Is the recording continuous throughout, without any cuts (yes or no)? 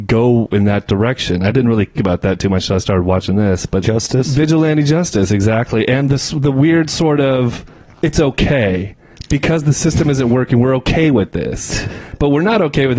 no